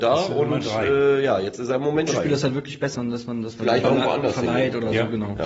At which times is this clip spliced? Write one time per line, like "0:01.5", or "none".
0:02.1
0:02.9
0:03.8